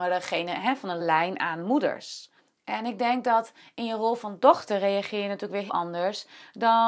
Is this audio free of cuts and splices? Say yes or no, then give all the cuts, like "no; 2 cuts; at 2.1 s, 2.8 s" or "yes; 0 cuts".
no; 3 cuts; at 1.0 s, 2.4 s, 5.7 s